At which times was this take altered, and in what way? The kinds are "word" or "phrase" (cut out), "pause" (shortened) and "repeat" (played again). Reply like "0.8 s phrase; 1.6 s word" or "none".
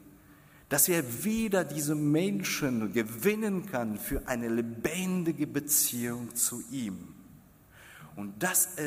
none